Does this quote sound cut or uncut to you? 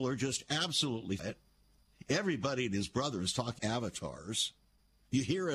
cut